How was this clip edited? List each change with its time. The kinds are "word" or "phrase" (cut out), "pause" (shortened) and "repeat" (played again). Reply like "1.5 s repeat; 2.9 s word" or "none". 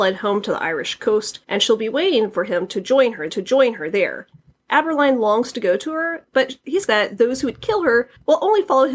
1.4 s pause; 3.3 s repeat; 6.9 s word